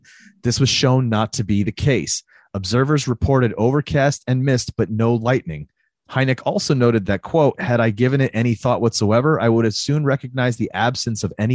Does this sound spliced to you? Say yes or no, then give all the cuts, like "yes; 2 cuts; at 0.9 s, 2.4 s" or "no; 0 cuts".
no; 0 cuts